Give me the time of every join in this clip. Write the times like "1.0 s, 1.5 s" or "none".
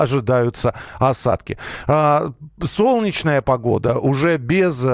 none